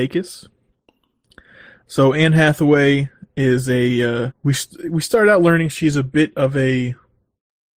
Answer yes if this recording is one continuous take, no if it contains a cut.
no